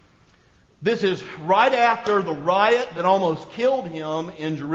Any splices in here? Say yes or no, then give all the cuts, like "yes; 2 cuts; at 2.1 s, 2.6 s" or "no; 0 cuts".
no; 0 cuts